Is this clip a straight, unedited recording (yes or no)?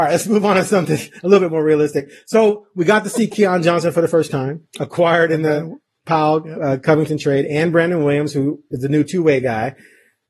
yes